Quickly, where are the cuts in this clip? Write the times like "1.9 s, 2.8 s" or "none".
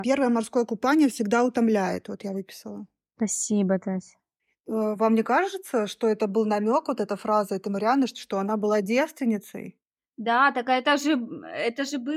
none